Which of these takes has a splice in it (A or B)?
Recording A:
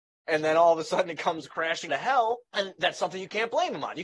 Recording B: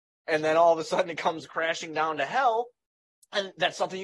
A